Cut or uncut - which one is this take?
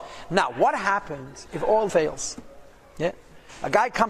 cut